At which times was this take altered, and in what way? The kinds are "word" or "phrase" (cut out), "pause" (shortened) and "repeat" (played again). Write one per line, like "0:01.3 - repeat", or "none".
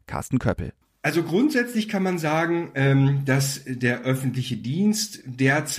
none